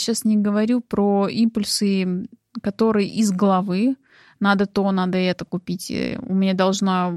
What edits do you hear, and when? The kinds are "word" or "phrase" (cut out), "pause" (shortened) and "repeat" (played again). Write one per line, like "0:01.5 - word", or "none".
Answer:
none